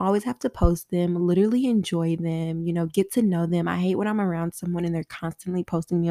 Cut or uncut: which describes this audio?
uncut